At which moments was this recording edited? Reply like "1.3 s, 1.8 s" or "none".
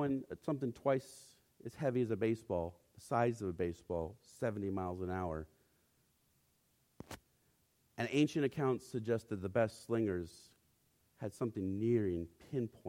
none